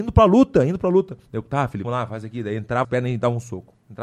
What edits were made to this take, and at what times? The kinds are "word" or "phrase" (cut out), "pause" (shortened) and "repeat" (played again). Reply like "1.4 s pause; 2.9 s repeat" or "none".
1.3 s pause; 1.8 s word; 2.8 s word